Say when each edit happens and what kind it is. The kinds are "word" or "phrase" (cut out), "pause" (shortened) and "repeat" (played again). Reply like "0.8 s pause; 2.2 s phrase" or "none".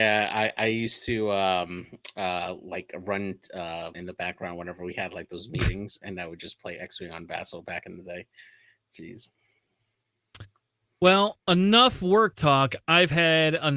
3.9 s phrase